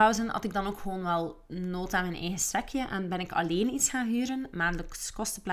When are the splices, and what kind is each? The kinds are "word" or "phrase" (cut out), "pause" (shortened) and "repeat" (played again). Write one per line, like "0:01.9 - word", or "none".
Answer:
none